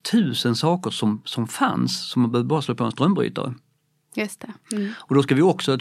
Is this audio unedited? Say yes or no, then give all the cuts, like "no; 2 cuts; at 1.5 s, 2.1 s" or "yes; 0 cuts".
yes; 0 cuts